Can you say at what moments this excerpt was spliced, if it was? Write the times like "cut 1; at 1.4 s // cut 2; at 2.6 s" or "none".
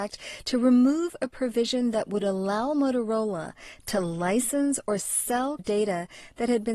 cut 1; at 5.6 s